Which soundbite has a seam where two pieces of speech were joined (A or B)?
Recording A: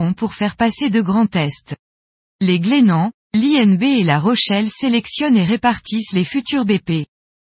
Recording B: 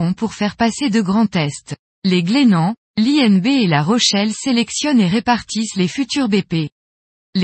B